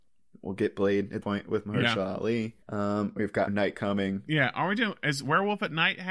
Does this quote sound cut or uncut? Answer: cut